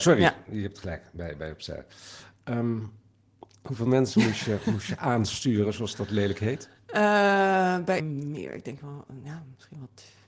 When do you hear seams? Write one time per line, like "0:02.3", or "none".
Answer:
0:08.0